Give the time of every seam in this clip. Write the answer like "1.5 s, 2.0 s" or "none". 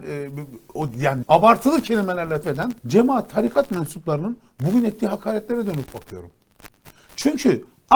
1.2 s, 2.4 s, 2.8 s